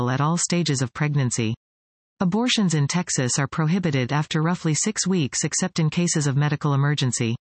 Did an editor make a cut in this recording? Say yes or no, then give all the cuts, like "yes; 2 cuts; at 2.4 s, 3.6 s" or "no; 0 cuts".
no; 0 cuts